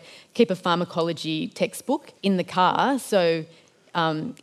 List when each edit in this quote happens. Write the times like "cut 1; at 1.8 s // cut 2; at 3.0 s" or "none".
cut 1; at 2.2 s